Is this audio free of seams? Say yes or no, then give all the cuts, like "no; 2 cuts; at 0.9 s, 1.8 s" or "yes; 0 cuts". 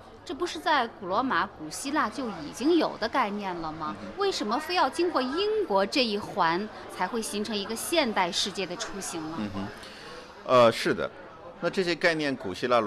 yes; 0 cuts